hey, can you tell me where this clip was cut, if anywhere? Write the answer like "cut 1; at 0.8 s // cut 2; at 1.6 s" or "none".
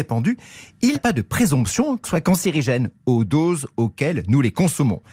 cut 1; at 0.9 s // cut 2; at 2.0 s

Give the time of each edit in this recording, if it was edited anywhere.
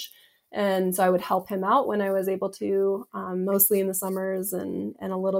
none

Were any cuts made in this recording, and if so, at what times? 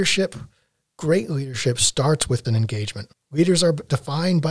cut 1; at 2.4 s

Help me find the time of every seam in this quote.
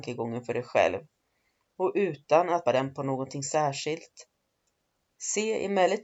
cut 1; at 2.6 s

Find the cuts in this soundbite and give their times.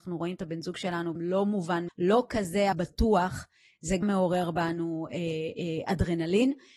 cut 1; at 1.2 s // cut 2; at 1.9 s // cut 3; at 2.7 s // cut 4; at 4.0 s

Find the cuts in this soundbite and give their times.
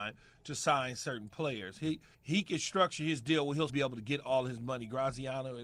cut 1; at 2.1 s // cut 2; at 3.7 s

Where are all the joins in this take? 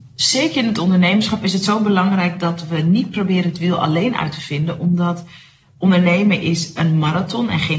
none

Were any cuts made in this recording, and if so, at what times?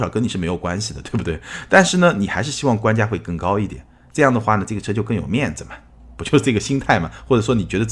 none

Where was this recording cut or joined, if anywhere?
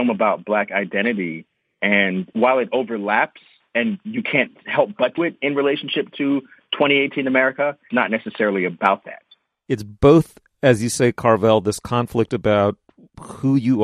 cut 1; at 2.3 s // cut 2; at 5.2 s // cut 3; at 7.9 s

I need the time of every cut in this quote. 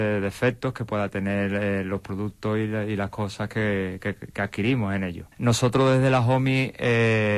cut 1; at 5.3 s

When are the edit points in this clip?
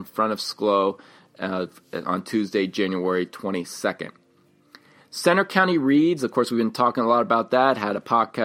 none

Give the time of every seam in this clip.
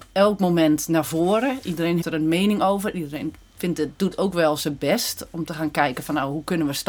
cut 1; at 2.0 s

